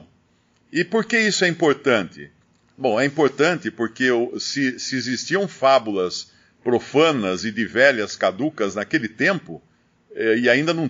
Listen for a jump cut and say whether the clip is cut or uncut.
uncut